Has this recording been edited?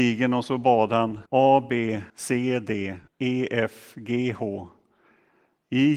yes; 3 cuts; at 1.3 s, 2.1 s, 3.1 s

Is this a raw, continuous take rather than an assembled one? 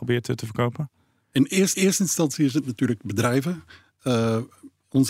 no; 1 cut; at 1.7 s

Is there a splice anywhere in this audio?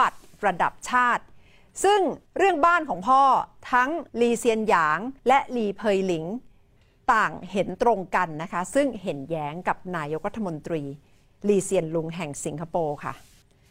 yes; 3 cuts; at 2.3 s, 4.1 s, 5.2 s

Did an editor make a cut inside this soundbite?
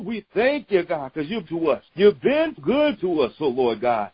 yes; 3 cuts; at 1.5 s, 1.9 s, 2.6 s

